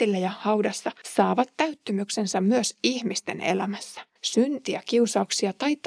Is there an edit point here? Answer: yes; 2 cuts; at 1.0 s, 4.2 s

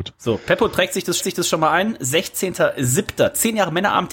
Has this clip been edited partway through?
yes; 1 cut; at 1.2 s

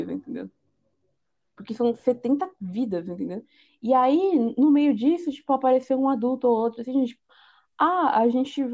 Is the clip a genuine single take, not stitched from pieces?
yes; 0 cuts

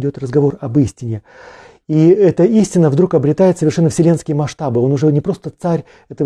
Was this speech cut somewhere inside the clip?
no; 0 cuts

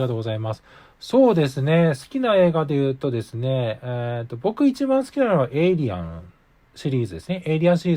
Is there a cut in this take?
no; 0 cuts

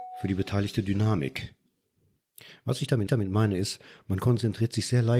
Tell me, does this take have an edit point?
yes; 1 cut; at 3.1 s

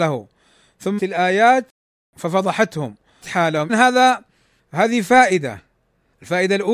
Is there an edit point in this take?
yes; 3 cuts; at 1.0 s, 3.2 s, 3.7 s

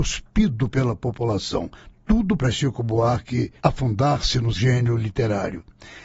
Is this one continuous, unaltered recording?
no; 3 cuts; at 2.4 s, 3.6 s, 4.5 s

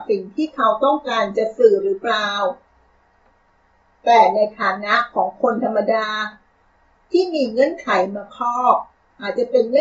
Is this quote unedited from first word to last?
yes; 0 cuts

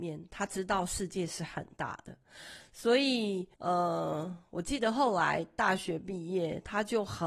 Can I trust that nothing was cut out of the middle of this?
no; 1 cut; at 3.5 s

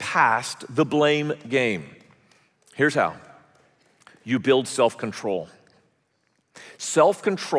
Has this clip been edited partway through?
no; 0 cuts

